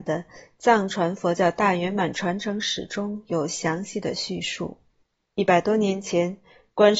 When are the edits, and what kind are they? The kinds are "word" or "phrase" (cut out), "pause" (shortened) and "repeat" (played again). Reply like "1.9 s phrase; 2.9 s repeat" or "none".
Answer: 5.0 s pause